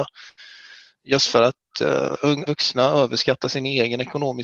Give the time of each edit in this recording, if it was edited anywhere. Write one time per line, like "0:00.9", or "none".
0:02.5
0:03.4